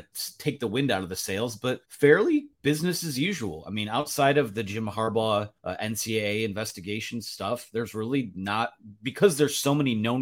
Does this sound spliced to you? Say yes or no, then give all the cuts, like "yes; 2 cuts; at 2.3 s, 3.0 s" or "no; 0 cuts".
yes; 2 cuts; at 1.8 s, 5.6 s